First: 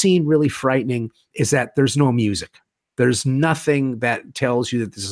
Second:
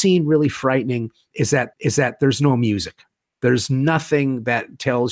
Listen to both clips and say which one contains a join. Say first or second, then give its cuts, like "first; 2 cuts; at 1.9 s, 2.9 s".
second; 1 cut; at 1.7 s